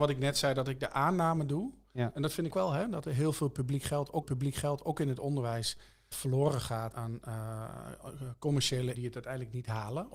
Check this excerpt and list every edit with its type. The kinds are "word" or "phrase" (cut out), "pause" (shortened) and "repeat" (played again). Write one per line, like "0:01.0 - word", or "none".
0:02.5 - phrase
0:04.2 - repeat
0:06.1 - word
0:06.9 - word
0:08.9 - word